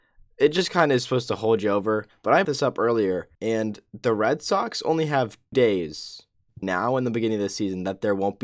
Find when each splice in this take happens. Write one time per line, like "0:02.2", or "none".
0:02.4
0:03.3
0:05.5
0:06.6